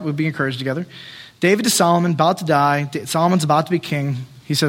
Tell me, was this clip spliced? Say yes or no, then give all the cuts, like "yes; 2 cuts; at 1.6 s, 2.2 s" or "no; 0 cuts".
no; 0 cuts